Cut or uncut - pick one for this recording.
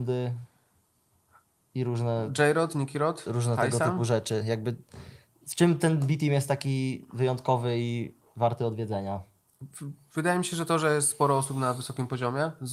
uncut